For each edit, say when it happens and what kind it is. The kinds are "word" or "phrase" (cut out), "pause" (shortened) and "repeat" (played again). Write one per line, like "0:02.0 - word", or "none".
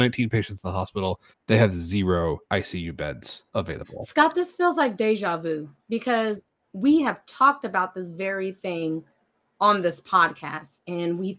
0:01.3 - pause
0:02.4 - pause
0:03.5 - pause

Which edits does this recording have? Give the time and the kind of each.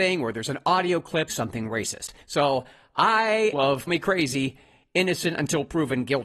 0:01.3 - phrase
0:02.2 - pause
0:03.5 - phrase
0:03.9 - word

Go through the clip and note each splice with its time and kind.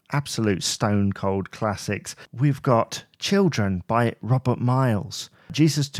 0:02.2 - pause

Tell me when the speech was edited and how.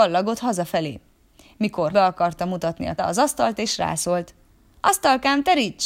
0:01.9 - phrase
0:03.0 - phrase

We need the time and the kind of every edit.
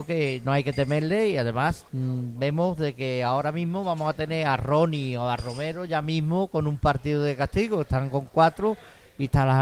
0:01.9 - pause

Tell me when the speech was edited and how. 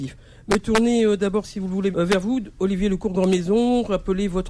0:01.9 - word

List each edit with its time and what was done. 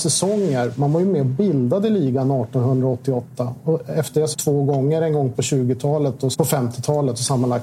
0:04.3 - phrase
0:05.3 - word
0:06.3 - word

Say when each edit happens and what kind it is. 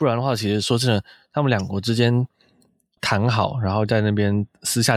0:03.0 - word

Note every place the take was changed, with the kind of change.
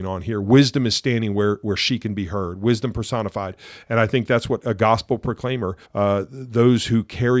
0:05.8 - pause

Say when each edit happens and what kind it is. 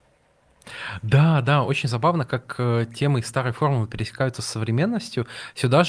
none

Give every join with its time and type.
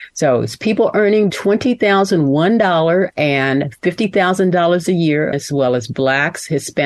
0:01.3 - word
0:05.3 - word

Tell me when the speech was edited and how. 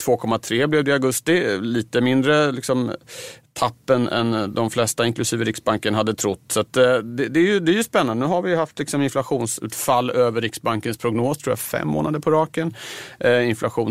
none

